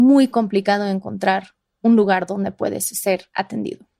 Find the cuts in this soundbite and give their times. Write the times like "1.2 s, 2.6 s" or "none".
none